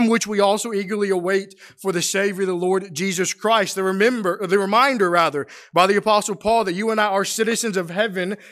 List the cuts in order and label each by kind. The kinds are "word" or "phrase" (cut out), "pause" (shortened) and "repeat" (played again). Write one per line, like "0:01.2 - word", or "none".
none